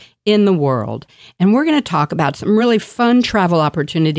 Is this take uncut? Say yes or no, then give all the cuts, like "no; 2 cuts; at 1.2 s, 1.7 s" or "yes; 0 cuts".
yes; 0 cuts